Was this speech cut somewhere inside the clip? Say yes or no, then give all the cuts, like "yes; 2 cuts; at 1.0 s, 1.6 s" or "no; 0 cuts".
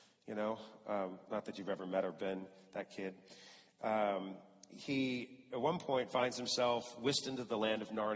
no; 0 cuts